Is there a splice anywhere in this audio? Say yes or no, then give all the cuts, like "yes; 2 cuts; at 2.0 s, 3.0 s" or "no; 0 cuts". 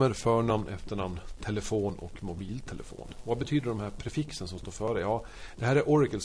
no; 0 cuts